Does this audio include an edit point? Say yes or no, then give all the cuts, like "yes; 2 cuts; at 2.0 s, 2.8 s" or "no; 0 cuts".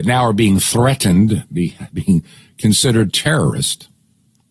yes; 2 cuts; at 1.9 s, 3.1 s